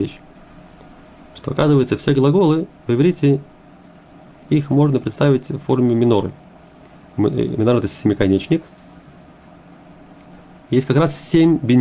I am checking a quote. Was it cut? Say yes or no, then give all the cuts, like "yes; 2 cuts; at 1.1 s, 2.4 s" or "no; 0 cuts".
no; 0 cuts